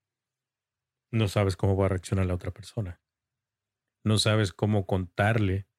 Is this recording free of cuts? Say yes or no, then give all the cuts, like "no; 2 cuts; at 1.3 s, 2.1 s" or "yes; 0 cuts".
yes; 0 cuts